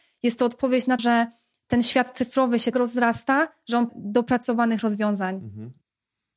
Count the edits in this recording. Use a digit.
3